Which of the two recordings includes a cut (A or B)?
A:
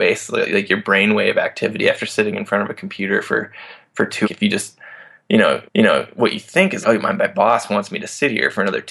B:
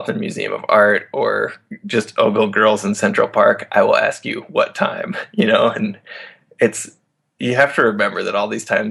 A